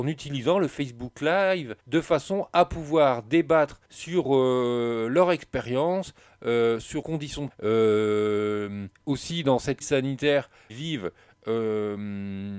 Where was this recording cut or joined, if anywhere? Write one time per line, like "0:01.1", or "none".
0:01.8
0:03.8
0:07.0
0:07.5
0:08.9
0:09.8
0:10.7

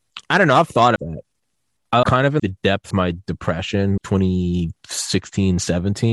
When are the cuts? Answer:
0:01.0
0:02.0
0:02.4
0:02.9
0:04.0

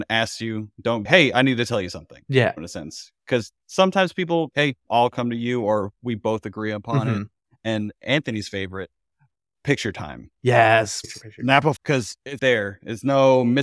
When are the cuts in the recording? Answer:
0:01.1
0:04.5
0:11.8
0:12.4

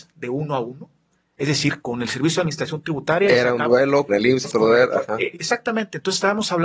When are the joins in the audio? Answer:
0:01.8
0:04.1
0:04.4
0:05.3

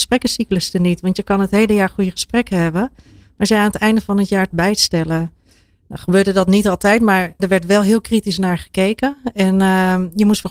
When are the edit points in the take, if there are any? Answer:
0:04.5
0:07.4

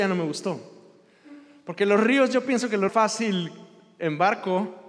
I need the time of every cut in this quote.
0:02.9

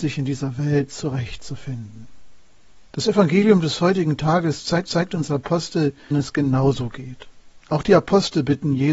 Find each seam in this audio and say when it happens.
0:02.9
0:04.9
0:06.1
0:07.6

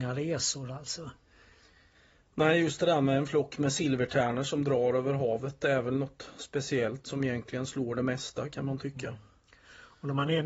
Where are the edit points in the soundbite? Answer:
none

